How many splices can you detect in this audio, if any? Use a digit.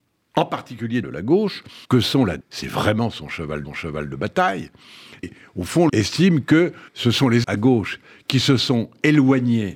8